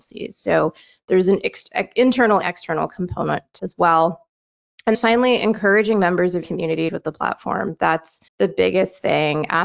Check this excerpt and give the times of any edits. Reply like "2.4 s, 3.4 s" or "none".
2.4 s, 3.6 s, 4.9 s, 6.4 s, 6.9 s, 8.3 s